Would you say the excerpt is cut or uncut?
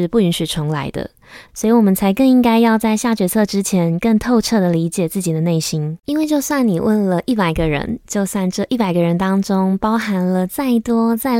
cut